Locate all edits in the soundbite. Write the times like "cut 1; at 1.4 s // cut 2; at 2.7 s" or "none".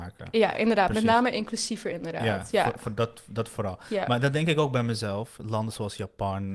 none